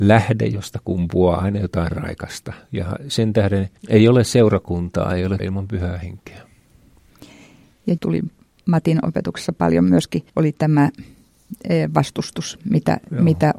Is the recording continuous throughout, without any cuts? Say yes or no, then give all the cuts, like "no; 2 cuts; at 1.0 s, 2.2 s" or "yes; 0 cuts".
no; 4 cuts; at 3.8 s, 5.4 s, 8.0 s, 10.3 s